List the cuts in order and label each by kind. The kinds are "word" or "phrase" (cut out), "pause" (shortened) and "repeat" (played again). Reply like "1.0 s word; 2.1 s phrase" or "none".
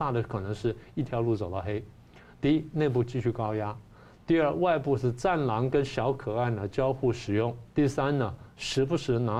7.7 s pause